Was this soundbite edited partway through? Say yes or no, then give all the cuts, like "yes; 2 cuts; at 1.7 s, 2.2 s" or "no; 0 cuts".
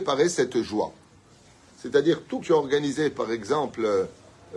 yes; 1 cut; at 2.4 s